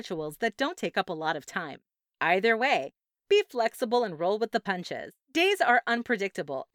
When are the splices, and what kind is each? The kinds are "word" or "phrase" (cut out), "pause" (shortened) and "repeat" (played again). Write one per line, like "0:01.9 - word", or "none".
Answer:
0:02.0 - pause
0:05.2 - pause